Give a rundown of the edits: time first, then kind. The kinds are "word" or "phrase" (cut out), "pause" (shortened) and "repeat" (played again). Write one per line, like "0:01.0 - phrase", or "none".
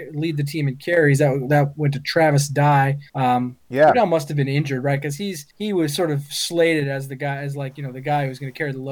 0:03.1 - pause
0:05.5 - pause